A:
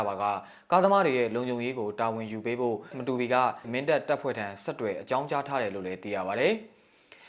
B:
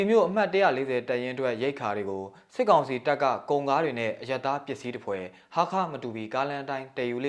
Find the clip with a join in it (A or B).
A